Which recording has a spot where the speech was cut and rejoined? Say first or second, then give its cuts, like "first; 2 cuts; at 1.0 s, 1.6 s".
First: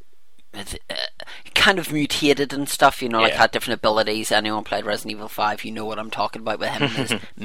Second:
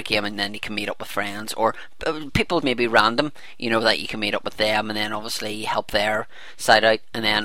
second; 1 cut; at 2.6 s